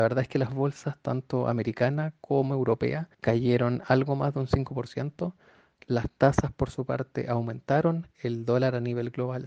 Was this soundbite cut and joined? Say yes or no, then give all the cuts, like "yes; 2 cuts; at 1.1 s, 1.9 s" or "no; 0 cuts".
yes; 1 cut; at 3.1 s